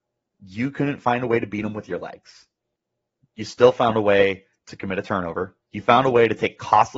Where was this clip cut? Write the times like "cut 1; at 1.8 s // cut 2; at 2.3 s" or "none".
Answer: cut 1; at 2.8 s // cut 2; at 5.6 s